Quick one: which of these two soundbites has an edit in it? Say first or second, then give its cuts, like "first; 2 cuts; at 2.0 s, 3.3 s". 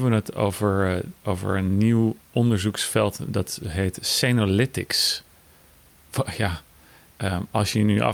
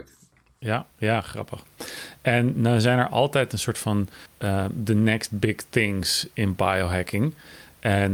second; 2 cuts; at 0.9 s, 4.3 s